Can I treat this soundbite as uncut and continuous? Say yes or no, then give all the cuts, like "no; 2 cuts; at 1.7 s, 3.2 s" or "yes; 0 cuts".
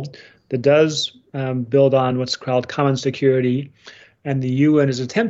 yes; 0 cuts